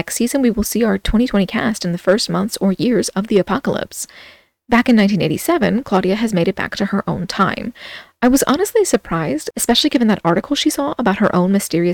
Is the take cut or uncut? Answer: uncut